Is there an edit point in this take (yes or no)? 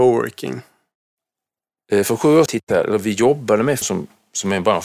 yes